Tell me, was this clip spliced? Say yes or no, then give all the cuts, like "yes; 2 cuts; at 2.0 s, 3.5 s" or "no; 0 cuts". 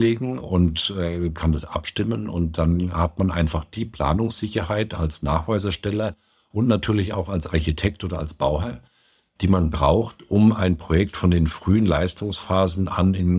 no; 0 cuts